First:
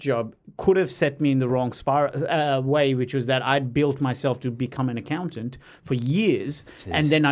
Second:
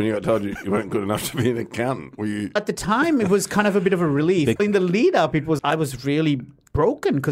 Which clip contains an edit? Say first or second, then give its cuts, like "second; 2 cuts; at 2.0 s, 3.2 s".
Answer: second; 3 cuts; at 2.6 s, 4.6 s, 5.6 s